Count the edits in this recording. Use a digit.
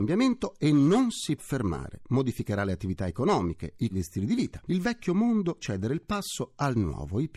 3